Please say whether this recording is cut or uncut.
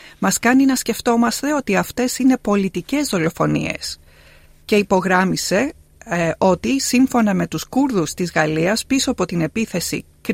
uncut